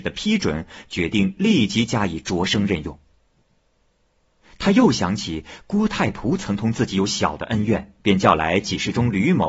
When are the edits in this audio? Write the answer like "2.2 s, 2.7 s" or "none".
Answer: 8.0 s